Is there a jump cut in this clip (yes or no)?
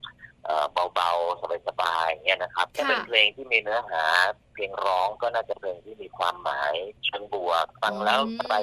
yes